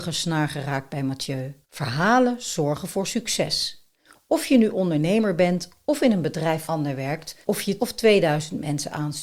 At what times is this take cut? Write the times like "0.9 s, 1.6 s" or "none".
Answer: 1.6 s, 6.7 s, 7.4 s, 7.8 s